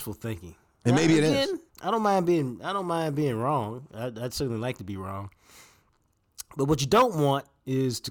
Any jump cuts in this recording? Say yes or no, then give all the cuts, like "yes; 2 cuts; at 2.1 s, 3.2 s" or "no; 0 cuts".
yes; 1 cut; at 1.7 s